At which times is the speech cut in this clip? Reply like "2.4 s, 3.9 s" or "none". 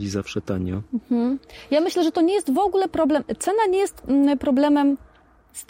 none